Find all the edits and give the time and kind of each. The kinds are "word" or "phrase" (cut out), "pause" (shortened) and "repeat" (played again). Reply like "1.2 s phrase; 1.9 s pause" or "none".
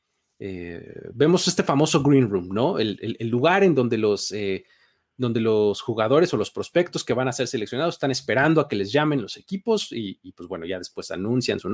none